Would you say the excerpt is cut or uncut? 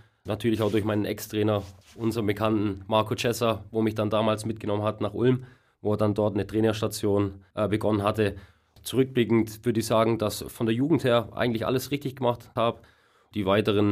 cut